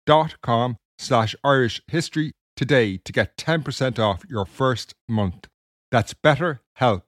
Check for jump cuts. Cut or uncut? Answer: uncut